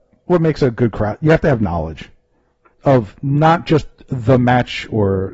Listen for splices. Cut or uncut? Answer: cut